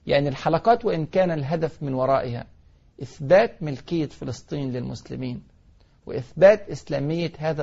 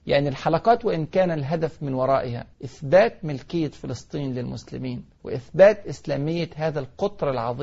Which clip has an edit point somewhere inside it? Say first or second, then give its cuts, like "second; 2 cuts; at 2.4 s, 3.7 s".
second; 2 cuts; at 2.5 s, 5.1 s